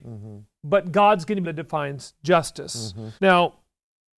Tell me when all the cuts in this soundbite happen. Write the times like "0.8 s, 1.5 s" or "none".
1.4 s, 3.2 s